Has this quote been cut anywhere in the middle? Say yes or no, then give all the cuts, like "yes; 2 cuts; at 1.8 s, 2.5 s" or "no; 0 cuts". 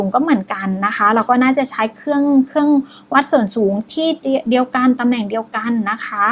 no; 0 cuts